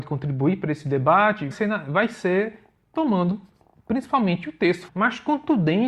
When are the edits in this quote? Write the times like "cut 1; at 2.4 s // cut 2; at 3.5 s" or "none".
cut 1; at 1.5 s // cut 2; at 4.9 s